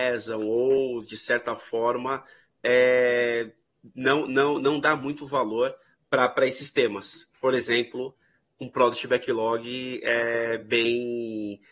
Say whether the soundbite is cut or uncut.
uncut